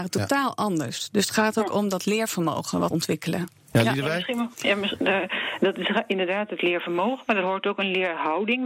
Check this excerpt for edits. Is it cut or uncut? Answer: cut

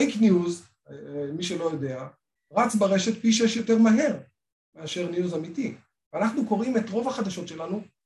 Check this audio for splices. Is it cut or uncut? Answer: uncut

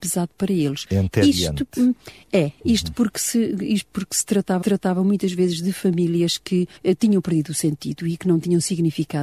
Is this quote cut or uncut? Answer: cut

